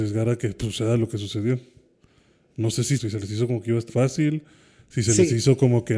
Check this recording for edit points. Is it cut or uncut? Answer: cut